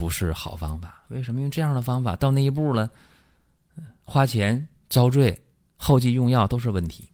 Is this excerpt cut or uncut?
uncut